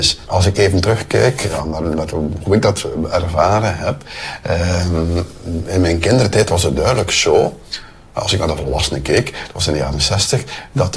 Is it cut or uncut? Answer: uncut